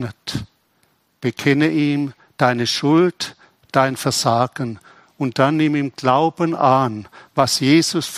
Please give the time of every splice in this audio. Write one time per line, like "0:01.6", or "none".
none